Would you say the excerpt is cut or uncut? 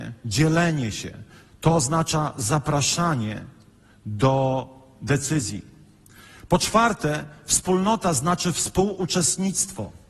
uncut